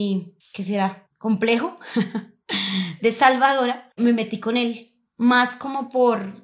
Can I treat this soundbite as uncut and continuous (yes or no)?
no